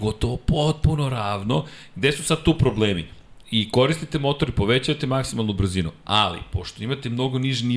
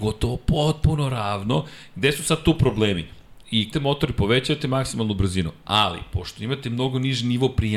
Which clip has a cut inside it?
second; 1 cut; at 3.7 s

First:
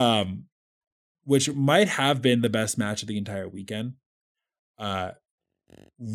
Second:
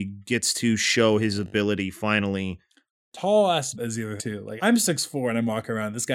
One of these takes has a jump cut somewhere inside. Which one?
second; 3 cuts; at 3.7 s, 4.2 s, 4.6 s

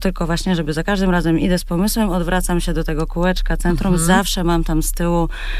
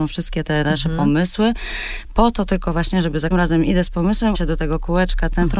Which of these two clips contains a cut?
second; 2 cuts; at 3.3 s, 4.3 s

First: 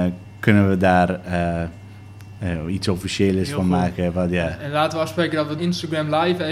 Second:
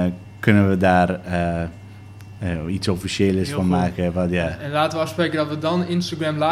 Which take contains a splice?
first; 1 cut; at 5.6 s

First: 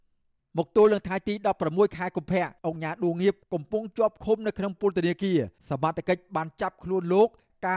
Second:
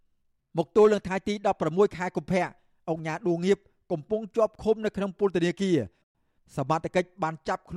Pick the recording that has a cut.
first; 3 cuts; at 2.6 s, 3.4 s, 5.6 s

